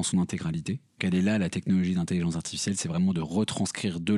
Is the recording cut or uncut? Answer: cut